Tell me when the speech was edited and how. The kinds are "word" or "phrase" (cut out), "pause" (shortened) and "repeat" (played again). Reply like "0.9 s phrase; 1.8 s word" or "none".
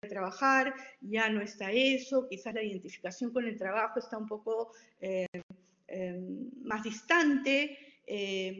none